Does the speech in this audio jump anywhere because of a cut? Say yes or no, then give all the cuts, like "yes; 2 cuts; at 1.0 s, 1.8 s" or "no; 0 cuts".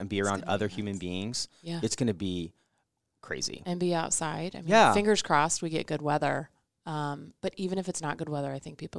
no; 0 cuts